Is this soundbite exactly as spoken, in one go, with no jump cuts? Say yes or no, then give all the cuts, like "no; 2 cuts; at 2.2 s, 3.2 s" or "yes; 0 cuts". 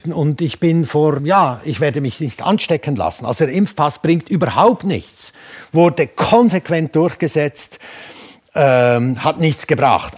no; 1 cut; at 1.2 s